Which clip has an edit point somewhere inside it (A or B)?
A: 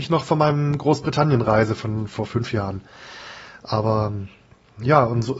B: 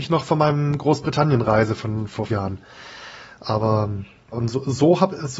B